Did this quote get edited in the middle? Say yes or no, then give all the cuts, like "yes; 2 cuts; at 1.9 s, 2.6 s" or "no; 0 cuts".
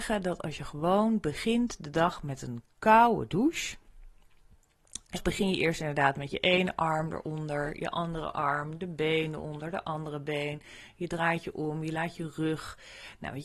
yes; 1 cut; at 5.1 s